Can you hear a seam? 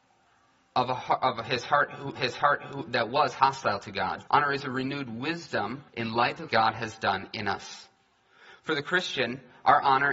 yes; 4 cuts; at 2.2 s, 4.3 s, 5.9 s, 6.5 s

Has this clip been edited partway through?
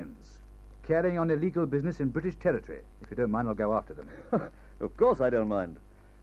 yes; 1 cut; at 2.9 s

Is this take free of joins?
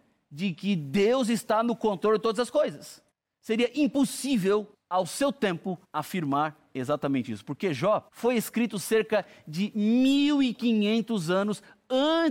no; 4 cuts; at 3.1 s, 4.7 s, 5.8 s, 8.1 s

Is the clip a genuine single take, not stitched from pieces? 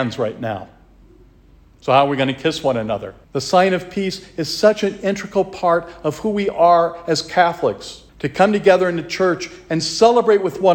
no; 2 cuts; at 3.2 s, 8.1 s

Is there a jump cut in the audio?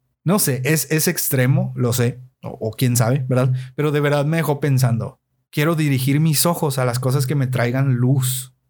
yes; 2 cuts; at 2.3 s, 5.3 s

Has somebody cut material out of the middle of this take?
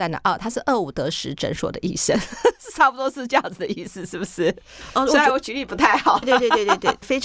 yes; 1 cut; at 6.2 s

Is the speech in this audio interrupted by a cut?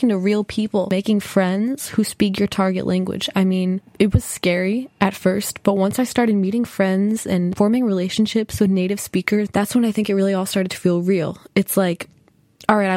no; 0 cuts

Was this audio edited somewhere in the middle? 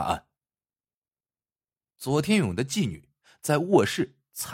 no; 0 cuts

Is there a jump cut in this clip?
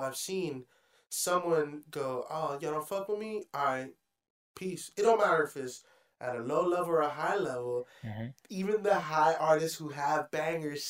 no; 0 cuts

